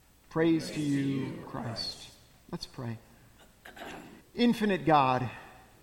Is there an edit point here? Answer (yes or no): yes